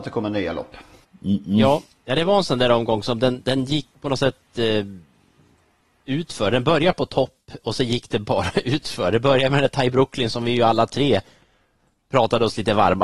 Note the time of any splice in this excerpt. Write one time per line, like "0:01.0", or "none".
none